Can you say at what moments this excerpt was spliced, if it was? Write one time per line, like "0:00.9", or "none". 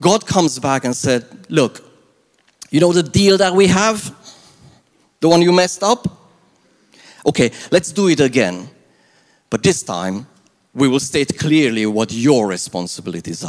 none

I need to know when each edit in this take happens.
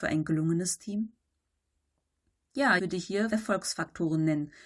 0:02.8
0:03.3

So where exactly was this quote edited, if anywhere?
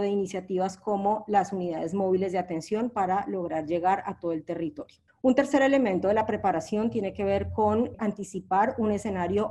0:05.1
0:08.0

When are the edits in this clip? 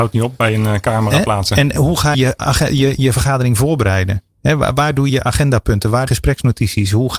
0:01.7
0:02.1
0:05.1
0:06.1

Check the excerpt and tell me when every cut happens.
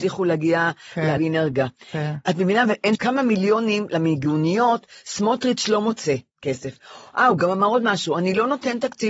0:01.2
0:02.9

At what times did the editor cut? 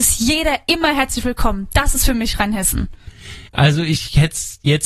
0:03.5

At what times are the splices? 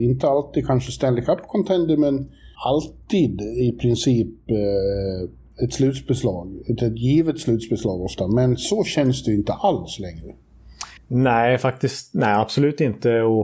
0:02.5
0:11.0

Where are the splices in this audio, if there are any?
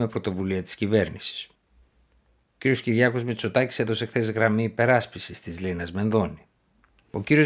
none

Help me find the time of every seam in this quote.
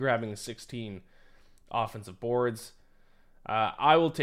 none

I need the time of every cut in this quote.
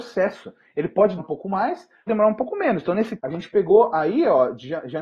0:01.2
0:02.1
0:03.2

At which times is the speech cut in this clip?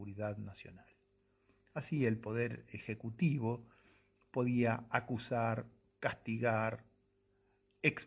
none

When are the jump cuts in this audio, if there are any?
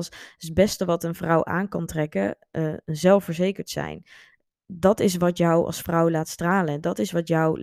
none

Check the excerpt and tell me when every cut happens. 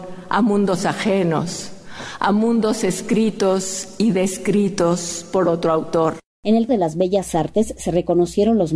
0:06.7

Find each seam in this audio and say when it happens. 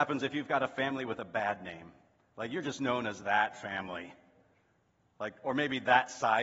none

